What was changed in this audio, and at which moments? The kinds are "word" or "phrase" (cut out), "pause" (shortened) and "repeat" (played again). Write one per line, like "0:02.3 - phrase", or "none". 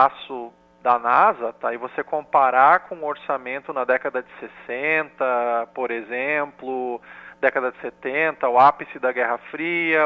none